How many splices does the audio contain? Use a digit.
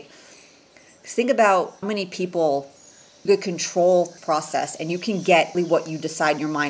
4